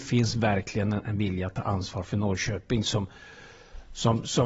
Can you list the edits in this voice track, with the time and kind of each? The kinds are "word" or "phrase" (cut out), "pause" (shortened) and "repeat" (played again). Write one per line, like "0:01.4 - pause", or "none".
none